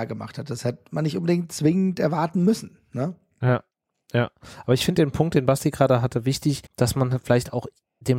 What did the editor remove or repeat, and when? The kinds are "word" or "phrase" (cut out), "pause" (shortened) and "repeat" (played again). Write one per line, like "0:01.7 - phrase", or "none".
0:06.7 - pause

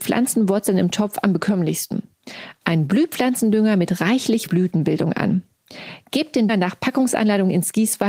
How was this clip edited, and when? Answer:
0:04.5 - phrase
0:06.5 - word

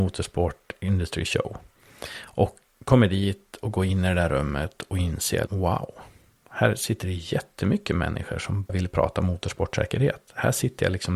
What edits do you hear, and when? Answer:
0:02.7 - word
0:05.5 - word
0:08.7 - word

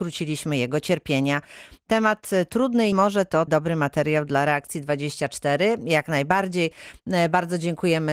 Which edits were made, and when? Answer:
0:02.9 - word
0:03.5 - word

